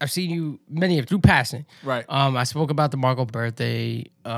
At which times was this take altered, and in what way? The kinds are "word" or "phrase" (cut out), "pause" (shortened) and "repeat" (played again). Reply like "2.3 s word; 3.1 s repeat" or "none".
1.1 s word; 3.3 s word